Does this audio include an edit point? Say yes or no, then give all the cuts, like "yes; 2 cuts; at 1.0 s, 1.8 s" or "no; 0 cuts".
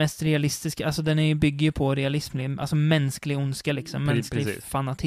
no; 0 cuts